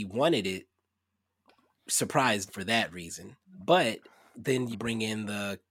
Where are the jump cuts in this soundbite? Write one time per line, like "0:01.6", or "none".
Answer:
0:02.5
0:03.4
0:04.7